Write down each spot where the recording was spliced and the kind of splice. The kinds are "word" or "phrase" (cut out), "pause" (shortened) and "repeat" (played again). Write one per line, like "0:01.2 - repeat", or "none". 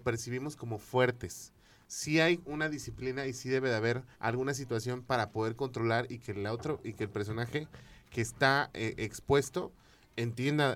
0:04.1 - pause